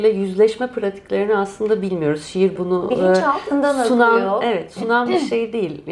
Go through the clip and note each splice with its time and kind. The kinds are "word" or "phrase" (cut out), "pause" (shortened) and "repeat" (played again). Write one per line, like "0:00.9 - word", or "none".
0:02.6 - word